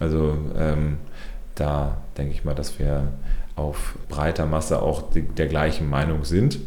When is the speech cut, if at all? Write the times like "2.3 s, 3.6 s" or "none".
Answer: 4.0 s